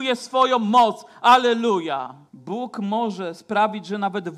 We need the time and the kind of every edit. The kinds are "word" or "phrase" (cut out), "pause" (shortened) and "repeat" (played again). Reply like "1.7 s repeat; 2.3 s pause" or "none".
2.3 s pause